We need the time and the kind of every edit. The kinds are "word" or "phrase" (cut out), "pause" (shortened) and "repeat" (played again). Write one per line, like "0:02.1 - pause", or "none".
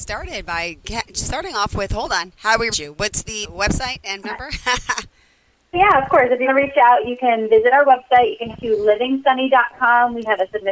0:02.7 - word
0:03.4 - word
0:04.2 - word
0:05.7 - word
0:06.5 - word
0:08.5 - word